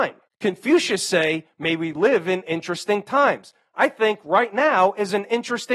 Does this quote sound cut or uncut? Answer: uncut